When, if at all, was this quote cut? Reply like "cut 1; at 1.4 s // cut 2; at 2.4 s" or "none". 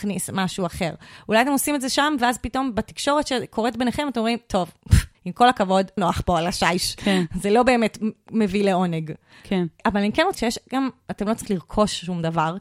cut 1; at 5.1 s // cut 2; at 6.0 s // cut 3; at 10.3 s // cut 4; at 11.5 s